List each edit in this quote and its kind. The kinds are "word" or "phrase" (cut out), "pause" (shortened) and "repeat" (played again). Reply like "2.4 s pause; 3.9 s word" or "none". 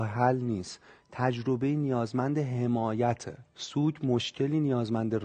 3.5 s pause